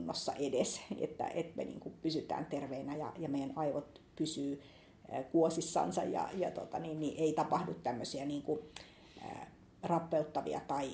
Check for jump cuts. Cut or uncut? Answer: uncut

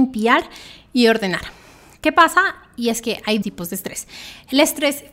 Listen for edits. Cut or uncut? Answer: cut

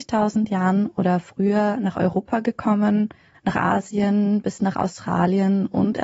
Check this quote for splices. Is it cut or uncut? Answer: uncut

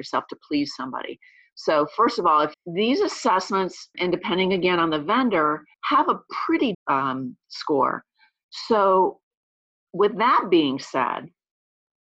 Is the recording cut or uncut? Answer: cut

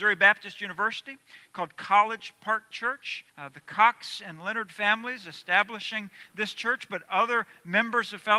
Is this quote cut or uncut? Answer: cut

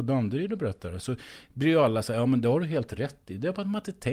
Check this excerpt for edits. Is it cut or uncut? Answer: uncut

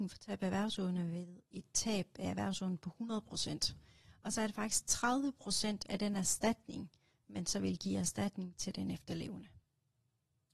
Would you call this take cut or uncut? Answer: uncut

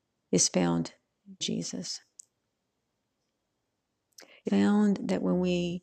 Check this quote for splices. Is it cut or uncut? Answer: cut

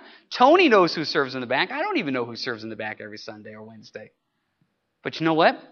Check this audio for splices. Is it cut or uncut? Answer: uncut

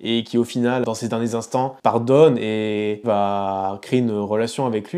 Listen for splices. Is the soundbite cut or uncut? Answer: cut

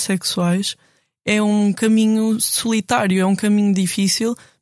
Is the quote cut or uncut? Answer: uncut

